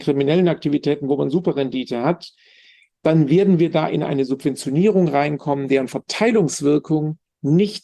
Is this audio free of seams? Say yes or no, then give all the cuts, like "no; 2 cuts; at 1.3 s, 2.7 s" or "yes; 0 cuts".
yes; 0 cuts